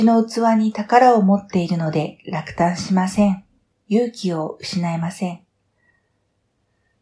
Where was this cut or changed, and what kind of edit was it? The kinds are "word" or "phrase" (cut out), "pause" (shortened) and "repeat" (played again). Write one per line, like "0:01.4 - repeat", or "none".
none

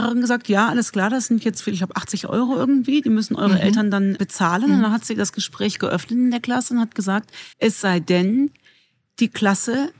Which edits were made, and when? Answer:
0:01.6 - phrase
0:04.2 - word
0:07.5 - pause

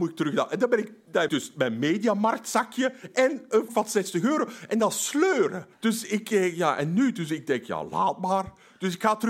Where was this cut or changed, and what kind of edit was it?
0:01.3 - word
0:03.7 - word
0:05.7 - pause

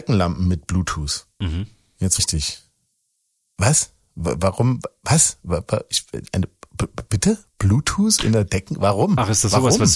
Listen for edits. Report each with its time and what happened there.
0:02.2 - word
0:07.1 - word

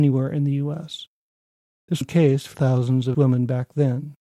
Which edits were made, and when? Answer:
0:02.0 - word
0:02.5 - word
0:03.1 - word

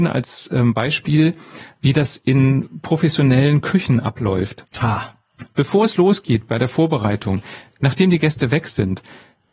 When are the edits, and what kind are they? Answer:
0:04.7 - pause

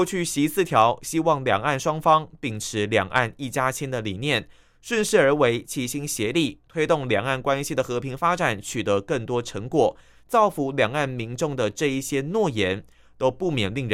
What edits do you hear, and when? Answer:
none

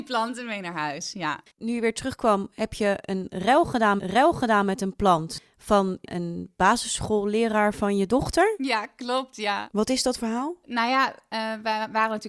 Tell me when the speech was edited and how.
0:01.5 - pause
0:04.0 - repeat
0:10.2 - word

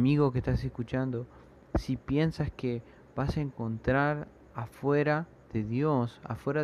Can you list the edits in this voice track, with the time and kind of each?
none

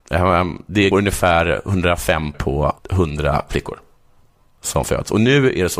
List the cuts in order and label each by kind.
0:00.9 - word
0:02.3 - word
0:02.8 - word
0:04.8 - word

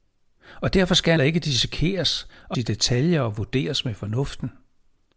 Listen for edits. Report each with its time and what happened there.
0:01.2 - word
0:02.5 - word

